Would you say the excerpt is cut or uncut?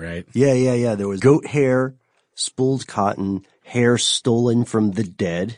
cut